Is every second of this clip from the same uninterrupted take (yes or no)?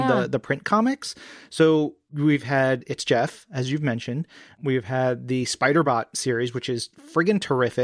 yes